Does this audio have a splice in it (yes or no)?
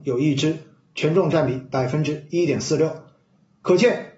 no